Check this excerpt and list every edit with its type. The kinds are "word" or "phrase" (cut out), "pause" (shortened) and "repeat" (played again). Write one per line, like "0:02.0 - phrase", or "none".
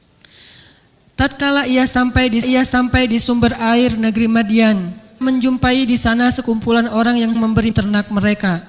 0:02.4 - repeat
0:05.2 - word
0:07.3 - word
0:07.7 - word